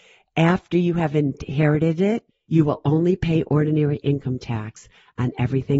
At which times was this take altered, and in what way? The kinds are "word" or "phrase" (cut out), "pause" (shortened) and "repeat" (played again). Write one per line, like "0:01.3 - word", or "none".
0:02.3 - pause